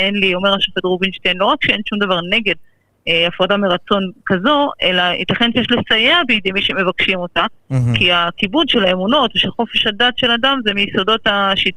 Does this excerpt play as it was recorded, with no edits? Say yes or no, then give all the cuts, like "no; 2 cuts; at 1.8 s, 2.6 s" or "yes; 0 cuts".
yes; 0 cuts